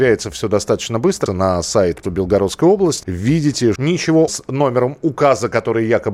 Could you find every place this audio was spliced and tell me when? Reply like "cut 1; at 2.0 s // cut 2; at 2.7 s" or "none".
cut 1; at 1.3 s // cut 2; at 2.0 s // cut 3; at 3.0 s // cut 4; at 3.8 s // cut 5; at 4.3 s